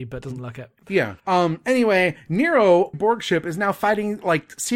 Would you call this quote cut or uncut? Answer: cut